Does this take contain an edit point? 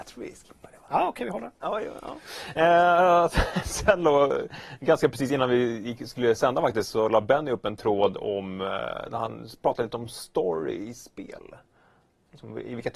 no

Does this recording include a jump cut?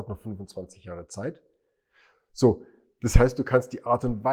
no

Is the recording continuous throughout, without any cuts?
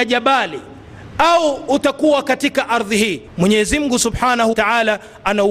no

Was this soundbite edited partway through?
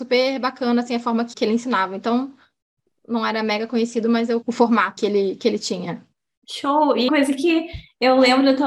yes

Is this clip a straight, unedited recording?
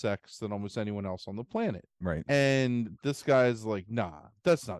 no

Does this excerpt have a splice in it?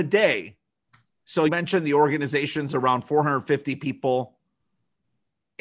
yes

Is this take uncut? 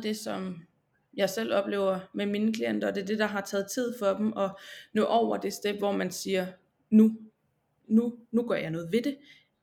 yes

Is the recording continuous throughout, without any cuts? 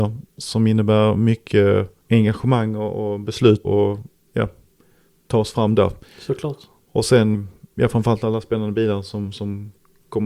no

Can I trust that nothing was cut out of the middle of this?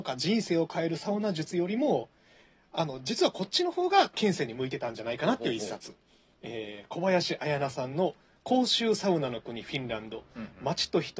yes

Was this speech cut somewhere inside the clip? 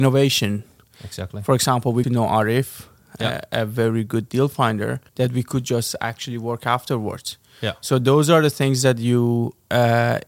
yes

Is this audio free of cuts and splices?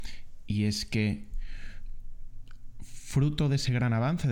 yes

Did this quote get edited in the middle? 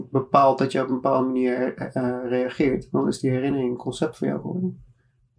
no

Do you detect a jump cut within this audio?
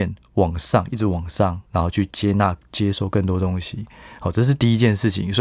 yes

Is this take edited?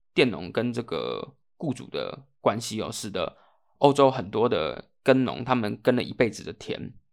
no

